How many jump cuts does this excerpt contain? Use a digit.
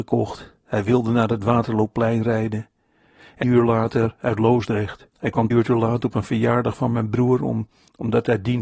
3